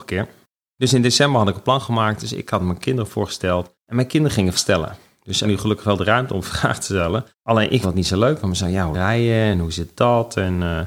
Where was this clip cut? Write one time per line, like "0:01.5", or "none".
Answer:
0:03.8
0:04.5
0:05.4
0:07.3
0:07.8
0:08.9